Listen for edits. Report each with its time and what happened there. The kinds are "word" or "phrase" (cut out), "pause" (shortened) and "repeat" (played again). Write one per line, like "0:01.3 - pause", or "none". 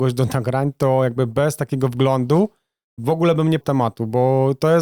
0:03.0 - word
0:03.6 - word